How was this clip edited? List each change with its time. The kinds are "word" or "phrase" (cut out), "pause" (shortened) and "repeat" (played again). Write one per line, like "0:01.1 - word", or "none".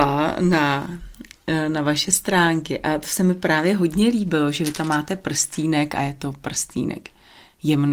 none